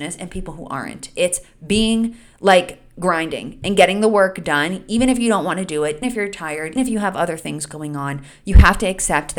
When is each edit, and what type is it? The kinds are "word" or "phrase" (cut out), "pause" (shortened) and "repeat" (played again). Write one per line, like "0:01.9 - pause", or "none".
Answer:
0:06.0 - word
0:06.8 - word